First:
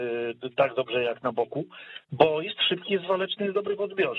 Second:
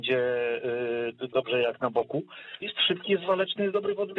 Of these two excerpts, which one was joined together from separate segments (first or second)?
second